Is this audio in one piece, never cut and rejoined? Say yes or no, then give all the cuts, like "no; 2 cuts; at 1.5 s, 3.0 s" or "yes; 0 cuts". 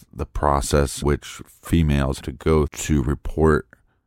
no; 3 cuts; at 1.0 s, 2.2 s, 2.7 s